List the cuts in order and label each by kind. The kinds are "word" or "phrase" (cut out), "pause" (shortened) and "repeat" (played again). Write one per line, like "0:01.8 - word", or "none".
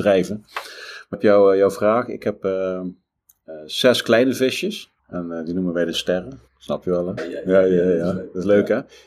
0:01.1 - word
0:05.0 - pause
0:05.9 - word
0:06.5 - pause
0:07.2 - word